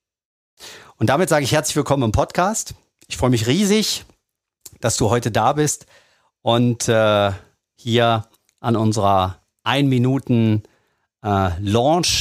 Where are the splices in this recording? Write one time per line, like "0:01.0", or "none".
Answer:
none